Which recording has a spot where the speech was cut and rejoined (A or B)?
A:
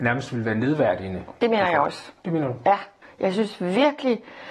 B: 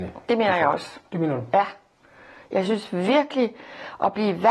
A